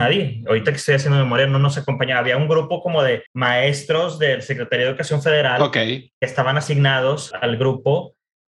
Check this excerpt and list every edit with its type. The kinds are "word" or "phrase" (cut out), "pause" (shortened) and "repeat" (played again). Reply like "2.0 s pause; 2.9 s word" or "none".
3.3 s pause; 7.3 s word